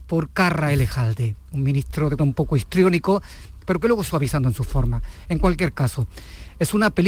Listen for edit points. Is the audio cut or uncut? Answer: cut